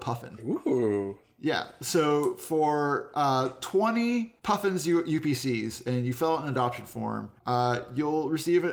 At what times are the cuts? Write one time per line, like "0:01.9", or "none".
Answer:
0:04.4
0:07.4